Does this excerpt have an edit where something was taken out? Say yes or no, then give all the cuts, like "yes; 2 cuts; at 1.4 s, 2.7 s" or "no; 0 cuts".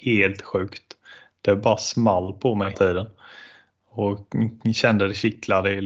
yes; 1 cut; at 2.7 s